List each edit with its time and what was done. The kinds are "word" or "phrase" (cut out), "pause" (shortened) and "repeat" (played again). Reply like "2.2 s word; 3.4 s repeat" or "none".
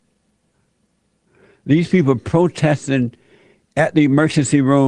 1.1 s pause